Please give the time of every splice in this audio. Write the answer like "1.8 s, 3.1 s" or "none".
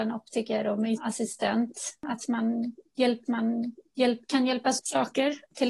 1.0 s, 3.3 s, 4.8 s

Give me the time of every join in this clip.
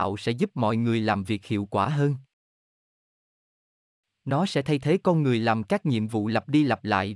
none

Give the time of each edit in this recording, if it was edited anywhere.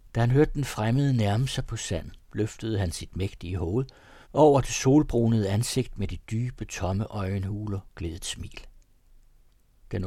2.2 s, 4.2 s

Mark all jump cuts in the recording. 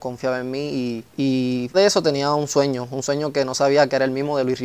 1.1 s, 1.7 s

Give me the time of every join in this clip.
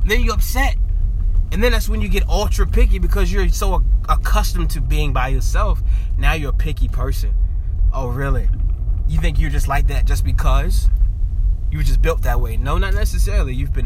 none

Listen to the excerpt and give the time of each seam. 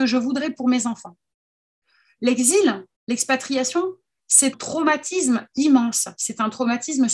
2.9 s, 4.5 s

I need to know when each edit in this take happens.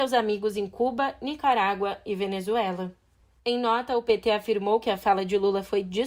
none

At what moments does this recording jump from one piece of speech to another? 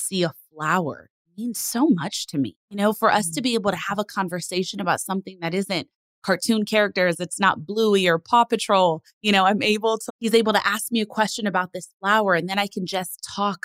2.6 s, 9.1 s, 10.1 s

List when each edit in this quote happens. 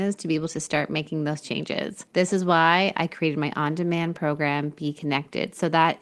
2.1 s

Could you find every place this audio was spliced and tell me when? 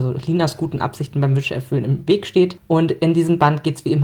none

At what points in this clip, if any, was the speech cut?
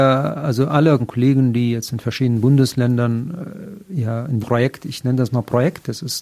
1.0 s, 4.4 s

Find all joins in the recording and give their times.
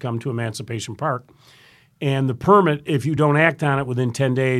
none

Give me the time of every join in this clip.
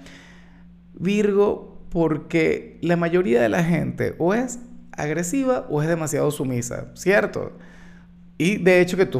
none

